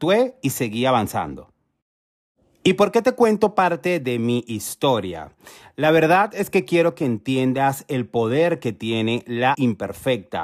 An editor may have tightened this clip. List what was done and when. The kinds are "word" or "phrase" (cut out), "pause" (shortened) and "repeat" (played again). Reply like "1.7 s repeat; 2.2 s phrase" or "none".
9.5 s word